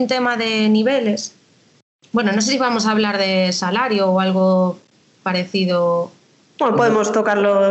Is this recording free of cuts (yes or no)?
yes